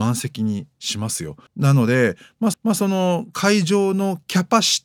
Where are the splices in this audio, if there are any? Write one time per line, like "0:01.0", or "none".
0:01.5
0:02.5